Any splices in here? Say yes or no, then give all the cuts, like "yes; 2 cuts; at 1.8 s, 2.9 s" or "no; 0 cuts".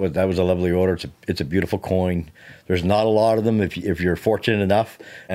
no; 0 cuts